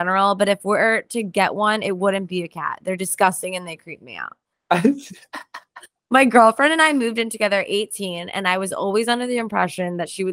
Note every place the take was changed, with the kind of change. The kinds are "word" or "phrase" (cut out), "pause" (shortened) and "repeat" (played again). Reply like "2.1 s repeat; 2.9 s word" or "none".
none